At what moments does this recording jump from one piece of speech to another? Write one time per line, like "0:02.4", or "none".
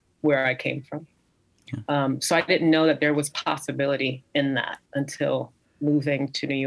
0:04.8

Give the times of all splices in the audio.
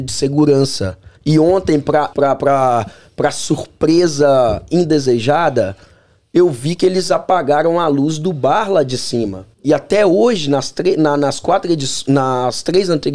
0:01.2
0:02.1
0:09.5

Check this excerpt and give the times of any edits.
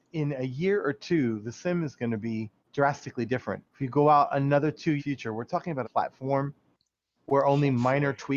0:02.6
0:03.7
0:05.0
0:05.8

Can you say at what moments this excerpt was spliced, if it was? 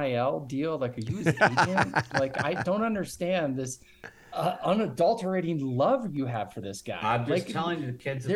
none

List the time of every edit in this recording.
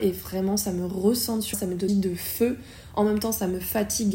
0:01.5
0:01.9

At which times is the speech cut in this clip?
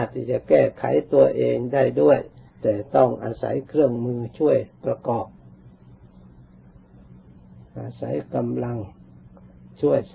0:02.5

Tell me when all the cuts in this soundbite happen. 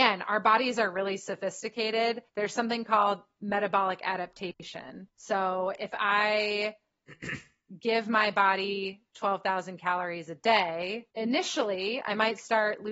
0:02.3
0:05.1
0:11.1

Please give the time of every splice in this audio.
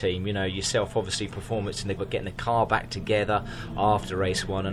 0:01.3
0:02.0

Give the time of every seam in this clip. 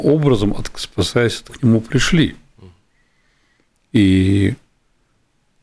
0:01.5

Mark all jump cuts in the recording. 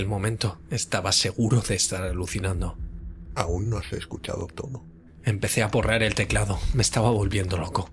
none

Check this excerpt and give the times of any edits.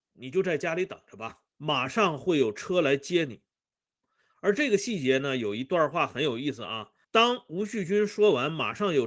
0:01.5
0:03.5
0:07.0

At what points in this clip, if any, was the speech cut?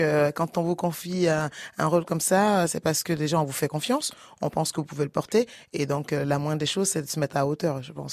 none

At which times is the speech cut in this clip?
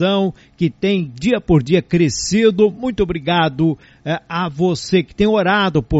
none

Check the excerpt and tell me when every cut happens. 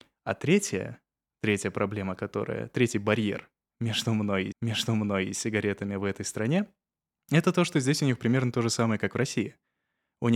0:04.5

